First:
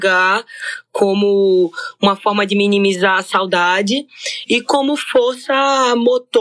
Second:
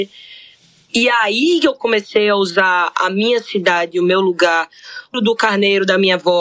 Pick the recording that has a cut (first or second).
second